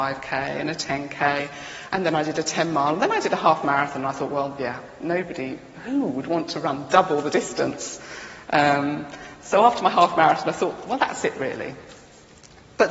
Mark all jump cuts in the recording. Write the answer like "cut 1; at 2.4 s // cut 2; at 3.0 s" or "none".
none